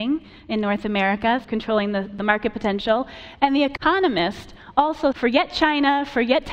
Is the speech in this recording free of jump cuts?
no; 2 cuts; at 1.4 s, 5.1 s

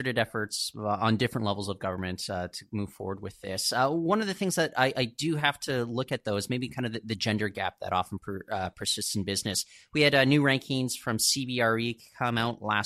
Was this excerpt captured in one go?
yes; 0 cuts

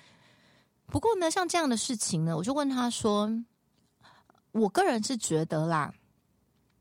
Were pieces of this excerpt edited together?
no; 0 cuts

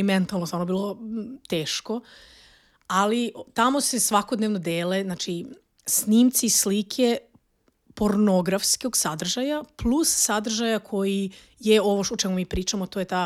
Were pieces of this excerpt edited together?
no; 0 cuts

